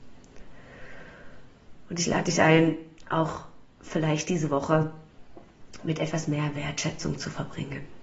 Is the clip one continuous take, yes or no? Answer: yes